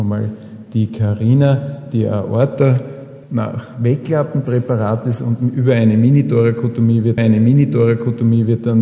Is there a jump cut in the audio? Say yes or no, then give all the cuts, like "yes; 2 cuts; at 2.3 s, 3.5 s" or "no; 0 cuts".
yes; 3 cuts; at 3.2 s, 4.4 s, 7.2 s